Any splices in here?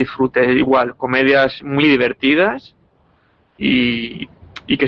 yes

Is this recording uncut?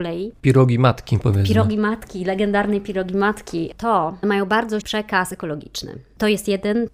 no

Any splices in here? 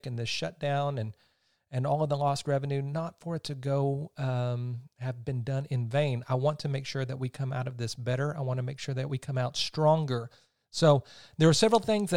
no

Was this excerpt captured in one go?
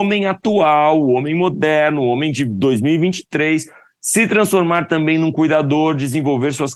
yes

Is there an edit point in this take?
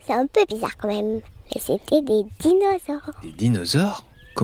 no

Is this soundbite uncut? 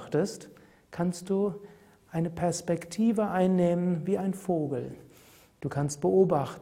yes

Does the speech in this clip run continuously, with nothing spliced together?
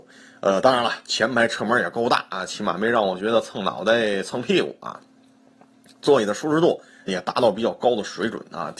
no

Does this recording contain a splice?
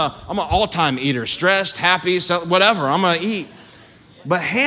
no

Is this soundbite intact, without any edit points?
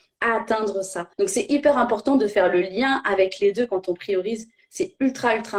no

